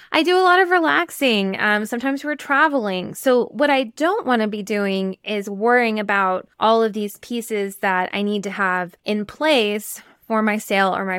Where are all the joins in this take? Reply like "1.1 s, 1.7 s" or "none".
6.5 s, 9.0 s